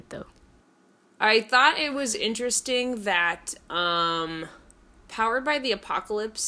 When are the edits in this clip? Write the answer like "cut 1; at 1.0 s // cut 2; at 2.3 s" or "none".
cut 1; at 4.8 s